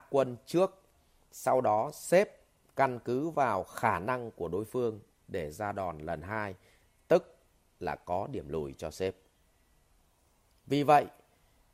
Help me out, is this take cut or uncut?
uncut